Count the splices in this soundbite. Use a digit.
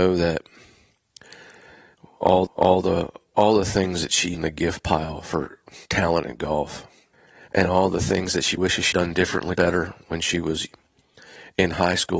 7